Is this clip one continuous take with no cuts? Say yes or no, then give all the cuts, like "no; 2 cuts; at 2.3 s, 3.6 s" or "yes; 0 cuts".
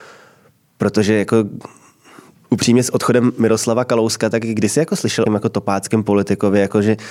no; 1 cut; at 5.3 s